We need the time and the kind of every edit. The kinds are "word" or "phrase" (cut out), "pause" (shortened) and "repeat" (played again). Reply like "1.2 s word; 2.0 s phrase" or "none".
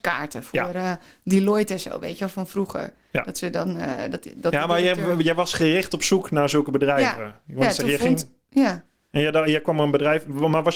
none